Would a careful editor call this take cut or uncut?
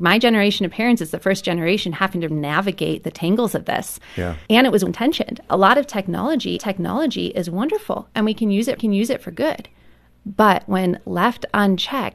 cut